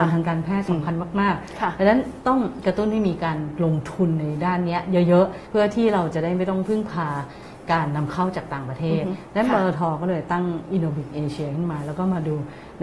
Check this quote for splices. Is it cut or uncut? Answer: cut